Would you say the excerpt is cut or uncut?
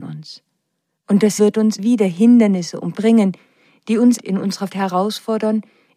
cut